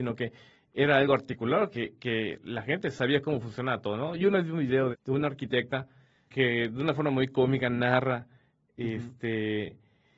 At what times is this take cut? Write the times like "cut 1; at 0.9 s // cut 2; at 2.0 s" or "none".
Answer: cut 1; at 4.9 s // cut 2; at 6.3 s

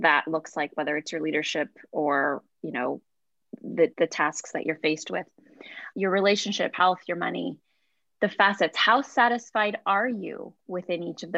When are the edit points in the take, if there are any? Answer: cut 1; at 3.9 s // cut 2; at 5.9 s // cut 3; at 6.7 s

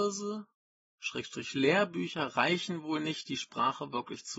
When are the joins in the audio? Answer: none

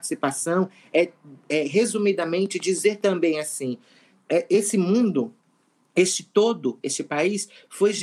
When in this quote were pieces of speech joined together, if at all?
none

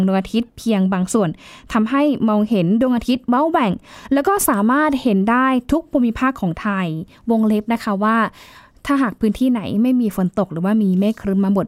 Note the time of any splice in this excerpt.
none

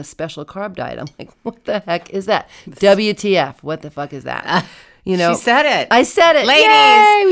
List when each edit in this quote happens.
none

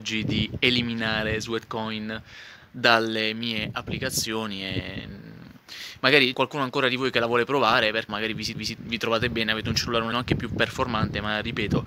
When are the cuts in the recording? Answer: cut 1; at 6.3 s // cut 2; at 8.1 s // cut 3; at 8.5 s // cut 4; at 10.1 s

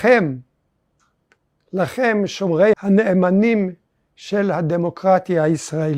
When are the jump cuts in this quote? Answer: cut 1; at 2.7 s

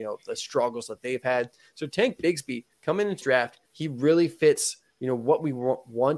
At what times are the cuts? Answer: cut 1; at 2.7 s // cut 2; at 3.2 s // cut 3; at 3.6 s

